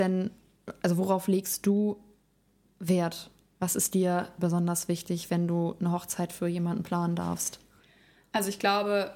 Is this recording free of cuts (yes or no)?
yes